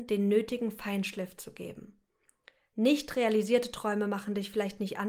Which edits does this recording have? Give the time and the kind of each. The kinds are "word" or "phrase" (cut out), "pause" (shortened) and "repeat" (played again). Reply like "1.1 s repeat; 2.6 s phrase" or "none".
none